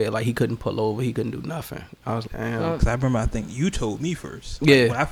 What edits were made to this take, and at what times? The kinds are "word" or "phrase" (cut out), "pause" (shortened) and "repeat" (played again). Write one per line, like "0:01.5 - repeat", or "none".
0:02.3 - word